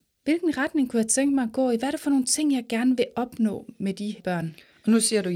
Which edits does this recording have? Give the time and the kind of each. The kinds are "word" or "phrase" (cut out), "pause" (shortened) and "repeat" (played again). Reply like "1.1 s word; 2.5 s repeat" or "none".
4.2 s word